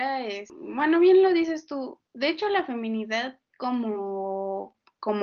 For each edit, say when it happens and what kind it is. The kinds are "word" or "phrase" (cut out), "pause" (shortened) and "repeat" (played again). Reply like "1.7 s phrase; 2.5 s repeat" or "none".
2.0 s pause

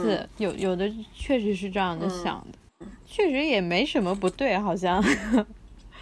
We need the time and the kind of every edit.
2.8 s word

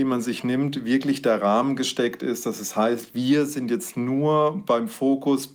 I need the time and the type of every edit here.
none

